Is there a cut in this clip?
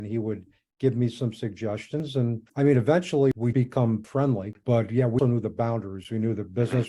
yes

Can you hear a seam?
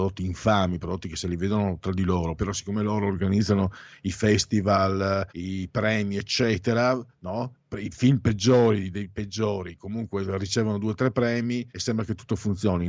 yes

